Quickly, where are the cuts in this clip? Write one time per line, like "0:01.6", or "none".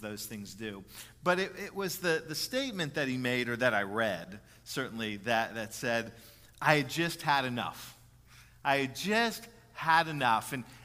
none